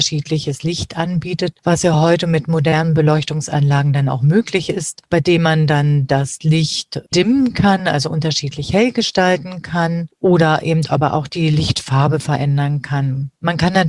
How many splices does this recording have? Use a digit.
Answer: 0